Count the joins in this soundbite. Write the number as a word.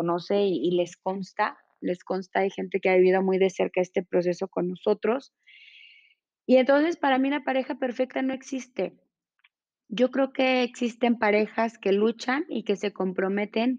zero